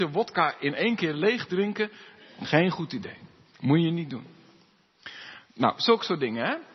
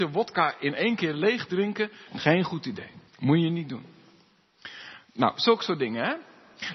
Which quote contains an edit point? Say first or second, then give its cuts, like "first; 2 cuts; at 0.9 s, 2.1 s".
second; 2 cuts; at 2.1 s, 3.1 s